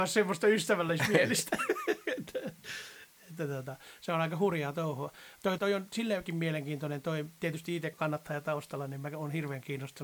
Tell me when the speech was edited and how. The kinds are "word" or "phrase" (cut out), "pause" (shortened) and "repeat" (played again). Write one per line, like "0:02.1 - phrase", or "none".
0:05.6 - word
0:07.9 - word